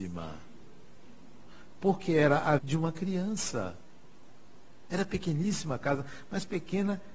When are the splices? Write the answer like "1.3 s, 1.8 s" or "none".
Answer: 2.6 s